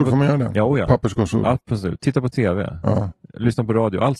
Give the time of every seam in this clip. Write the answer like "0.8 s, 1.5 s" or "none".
none